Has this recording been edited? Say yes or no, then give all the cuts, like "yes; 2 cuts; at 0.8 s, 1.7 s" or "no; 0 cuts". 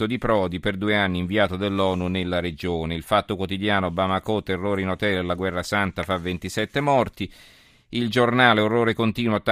no; 0 cuts